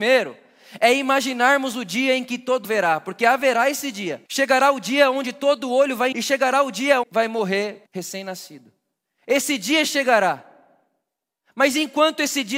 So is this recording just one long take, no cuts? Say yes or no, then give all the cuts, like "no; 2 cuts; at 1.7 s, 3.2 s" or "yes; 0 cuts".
no; 5 cuts; at 2.6 s, 4.3 s, 6.1 s, 7.0 s, 7.9 s